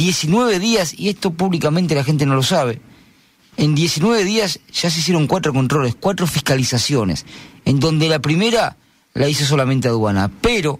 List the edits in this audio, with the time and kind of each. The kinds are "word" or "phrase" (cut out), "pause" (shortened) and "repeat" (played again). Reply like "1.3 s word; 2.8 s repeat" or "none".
none